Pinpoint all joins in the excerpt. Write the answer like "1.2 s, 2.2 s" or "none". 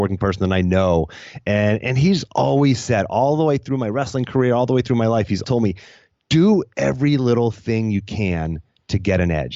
5.4 s